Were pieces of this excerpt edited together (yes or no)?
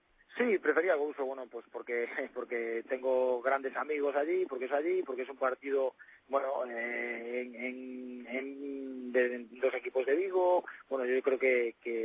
yes